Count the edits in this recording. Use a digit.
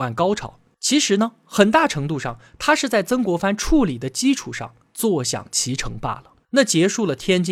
1